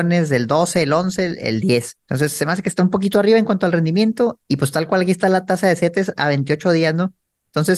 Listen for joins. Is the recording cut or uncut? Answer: cut